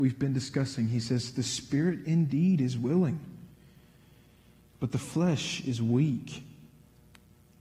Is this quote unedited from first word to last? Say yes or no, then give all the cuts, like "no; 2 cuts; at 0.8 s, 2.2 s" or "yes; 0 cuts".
yes; 0 cuts